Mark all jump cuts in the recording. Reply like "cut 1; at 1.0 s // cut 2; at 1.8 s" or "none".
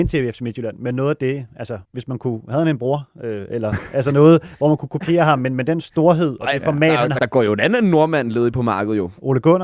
cut 1; at 1.8 s // cut 2; at 7.2 s